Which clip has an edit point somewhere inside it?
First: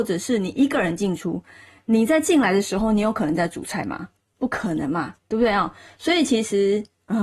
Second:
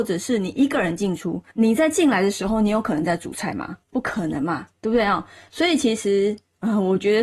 second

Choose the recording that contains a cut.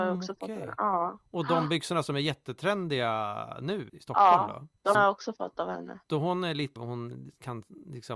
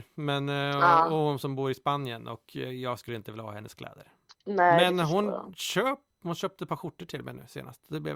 first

